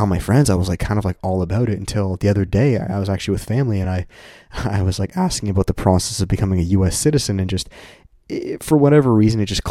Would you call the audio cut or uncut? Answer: uncut